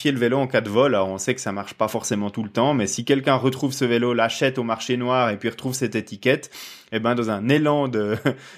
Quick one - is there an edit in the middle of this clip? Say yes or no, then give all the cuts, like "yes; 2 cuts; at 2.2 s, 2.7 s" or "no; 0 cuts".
no; 0 cuts